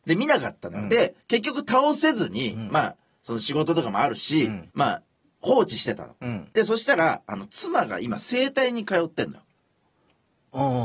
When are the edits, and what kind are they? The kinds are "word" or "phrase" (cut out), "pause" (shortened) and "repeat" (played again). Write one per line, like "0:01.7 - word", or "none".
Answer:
0:01.2 - pause
0:04.7 - pause
0:06.5 - pause